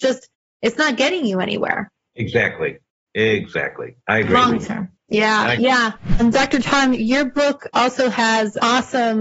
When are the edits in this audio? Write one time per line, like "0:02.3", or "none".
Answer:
none